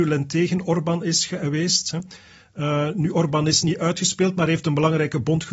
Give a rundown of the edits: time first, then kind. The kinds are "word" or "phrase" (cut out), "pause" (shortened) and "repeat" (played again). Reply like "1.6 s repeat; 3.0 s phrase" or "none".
none

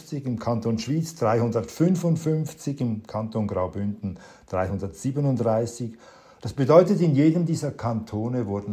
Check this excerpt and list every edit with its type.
none

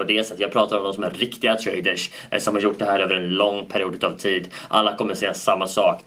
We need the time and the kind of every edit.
none

